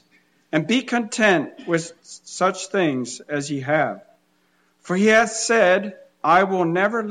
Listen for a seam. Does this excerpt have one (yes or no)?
no